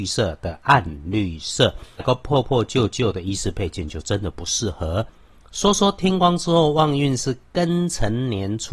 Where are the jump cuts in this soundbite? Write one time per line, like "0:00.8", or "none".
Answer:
0:02.0